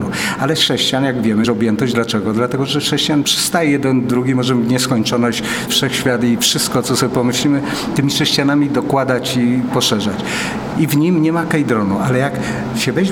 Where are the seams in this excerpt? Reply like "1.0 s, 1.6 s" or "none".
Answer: 1.4 s, 5.7 s